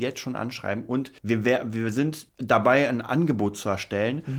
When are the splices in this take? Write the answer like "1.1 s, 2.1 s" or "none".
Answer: 1.2 s, 2.3 s